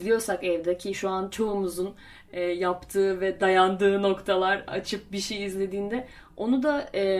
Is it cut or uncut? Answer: uncut